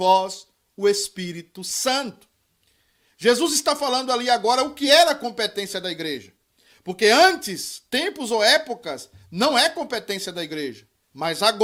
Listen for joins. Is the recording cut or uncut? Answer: uncut